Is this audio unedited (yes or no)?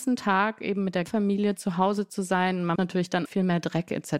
no